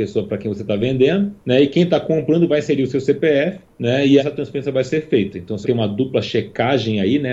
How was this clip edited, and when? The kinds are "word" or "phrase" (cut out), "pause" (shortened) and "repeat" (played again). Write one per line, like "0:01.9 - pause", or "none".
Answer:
0:01.4 - pause
0:03.7 - pause
0:04.2 - word
0:05.6 - word